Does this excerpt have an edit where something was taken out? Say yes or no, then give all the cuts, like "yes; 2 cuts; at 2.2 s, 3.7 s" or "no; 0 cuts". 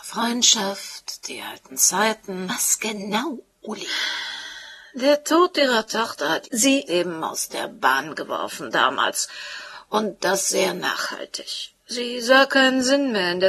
no; 0 cuts